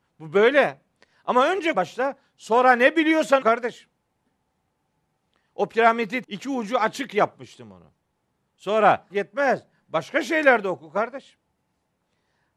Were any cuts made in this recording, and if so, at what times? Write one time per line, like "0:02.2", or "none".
0:01.7
0:03.4
0:06.2
0:09.1